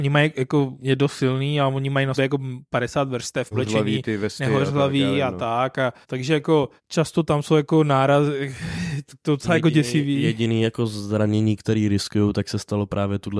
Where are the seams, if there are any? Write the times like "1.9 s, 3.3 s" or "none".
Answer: 2.2 s, 3.5 s, 6.0 s, 6.8 s